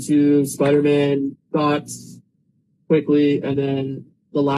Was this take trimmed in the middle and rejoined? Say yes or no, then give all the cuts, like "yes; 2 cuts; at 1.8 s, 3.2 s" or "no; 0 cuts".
no; 0 cuts